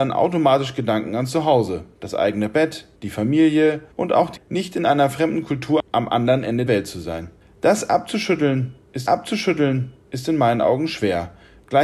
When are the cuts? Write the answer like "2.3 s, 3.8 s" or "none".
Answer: 1.9 s, 2.9 s, 3.9 s, 4.4 s, 6.7 s, 7.4 s, 9.1 s

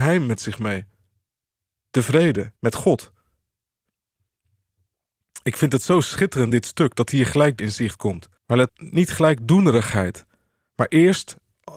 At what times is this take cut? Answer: 2.6 s, 6.5 s, 7.6 s, 8.4 s, 8.7 s

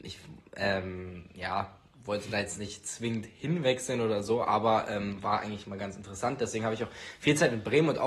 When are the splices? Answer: none

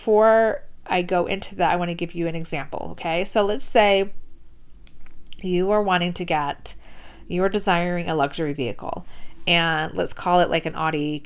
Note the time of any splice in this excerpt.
none

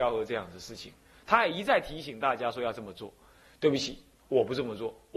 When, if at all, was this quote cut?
none

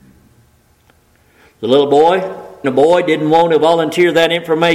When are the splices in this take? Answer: 2.6 s

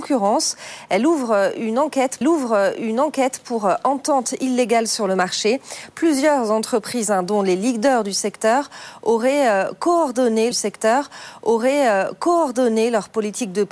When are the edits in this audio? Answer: 2.2 s, 10.5 s

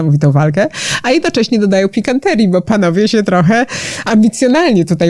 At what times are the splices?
none

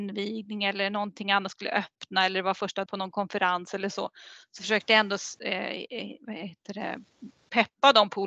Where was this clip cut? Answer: 2.9 s

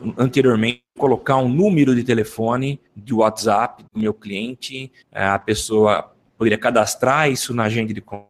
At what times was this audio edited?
2.9 s, 3.9 s, 5.0 s

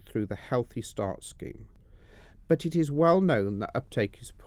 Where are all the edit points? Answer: none

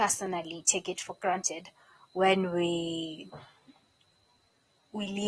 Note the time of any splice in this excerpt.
none

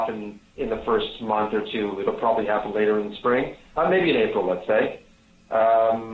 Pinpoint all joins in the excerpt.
none

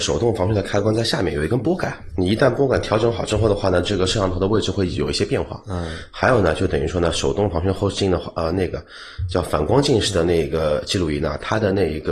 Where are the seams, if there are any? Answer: 2.1 s

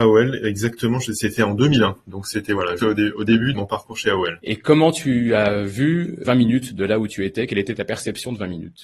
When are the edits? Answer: 2.8 s, 3.5 s, 6.2 s

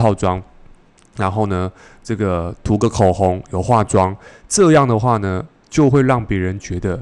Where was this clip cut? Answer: none

